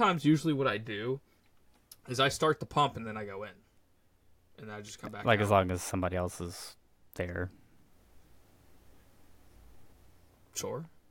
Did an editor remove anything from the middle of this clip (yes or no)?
no